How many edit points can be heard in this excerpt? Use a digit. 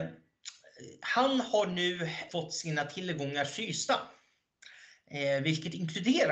1